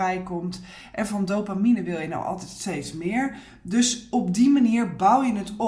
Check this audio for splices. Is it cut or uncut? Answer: uncut